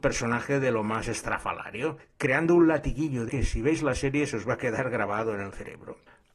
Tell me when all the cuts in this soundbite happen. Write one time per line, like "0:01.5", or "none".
0:02.0
0:03.3